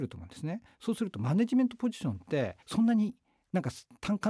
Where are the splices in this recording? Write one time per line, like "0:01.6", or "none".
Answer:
0:02.6